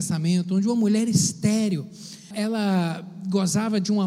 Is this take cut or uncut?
cut